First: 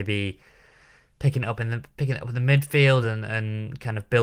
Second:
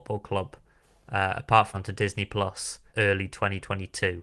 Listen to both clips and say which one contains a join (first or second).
second